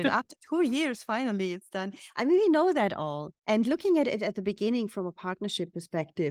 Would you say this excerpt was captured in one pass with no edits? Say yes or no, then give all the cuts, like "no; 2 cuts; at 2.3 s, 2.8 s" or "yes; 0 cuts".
no; 1 cut; at 3.4 s